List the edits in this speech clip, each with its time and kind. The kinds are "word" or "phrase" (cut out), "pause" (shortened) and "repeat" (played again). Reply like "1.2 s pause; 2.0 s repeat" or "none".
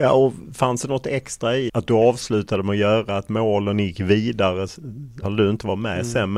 1.7 s word; 5.2 s word